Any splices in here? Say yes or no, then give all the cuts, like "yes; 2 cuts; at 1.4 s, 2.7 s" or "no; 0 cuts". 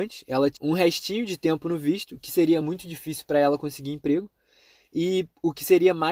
no; 0 cuts